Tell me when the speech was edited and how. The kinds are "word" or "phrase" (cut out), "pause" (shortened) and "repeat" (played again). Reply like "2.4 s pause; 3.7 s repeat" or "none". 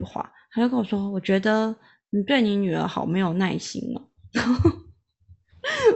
none